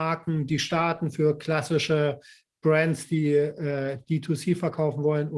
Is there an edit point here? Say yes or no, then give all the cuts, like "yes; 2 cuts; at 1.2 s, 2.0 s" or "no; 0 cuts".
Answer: no; 0 cuts